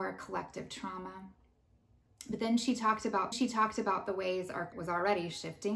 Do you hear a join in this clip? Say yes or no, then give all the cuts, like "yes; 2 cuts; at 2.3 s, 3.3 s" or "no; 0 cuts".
yes; 2 cuts; at 3.3 s, 4.7 s